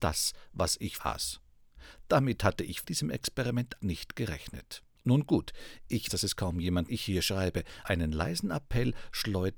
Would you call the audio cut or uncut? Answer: cut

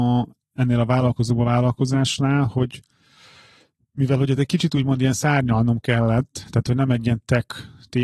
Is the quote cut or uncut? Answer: uncut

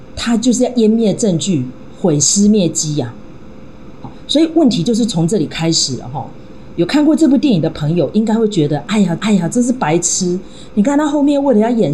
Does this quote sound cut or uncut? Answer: cut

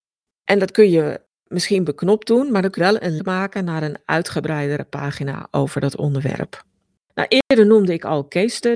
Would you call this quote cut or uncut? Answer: cut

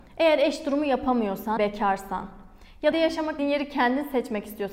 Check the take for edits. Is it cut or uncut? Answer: cut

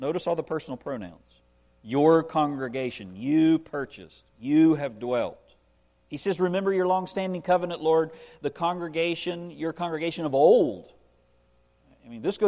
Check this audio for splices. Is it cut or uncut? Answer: cut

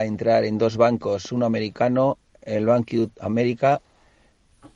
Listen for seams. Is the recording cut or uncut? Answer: uncut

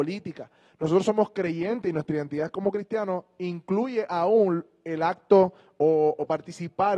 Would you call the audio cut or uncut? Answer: uncut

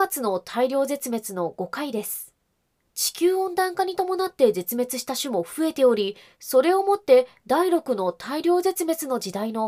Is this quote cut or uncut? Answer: uncut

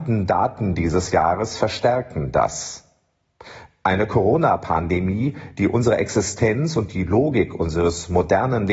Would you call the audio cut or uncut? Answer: uncut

